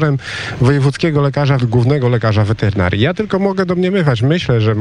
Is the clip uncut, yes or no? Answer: no